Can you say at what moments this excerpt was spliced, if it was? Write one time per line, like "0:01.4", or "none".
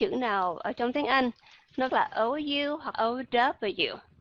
0:01.9
0:02.9